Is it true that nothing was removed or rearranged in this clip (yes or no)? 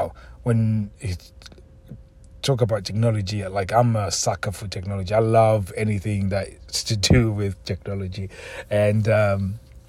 no